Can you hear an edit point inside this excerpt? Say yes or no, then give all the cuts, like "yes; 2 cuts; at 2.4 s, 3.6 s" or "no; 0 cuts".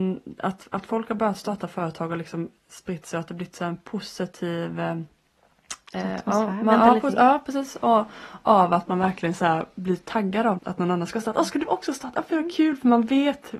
yes; 1 cut; at 10.6 s